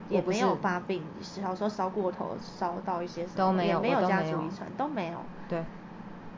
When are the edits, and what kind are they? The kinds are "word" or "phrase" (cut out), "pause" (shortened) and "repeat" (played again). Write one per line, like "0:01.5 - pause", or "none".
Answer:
none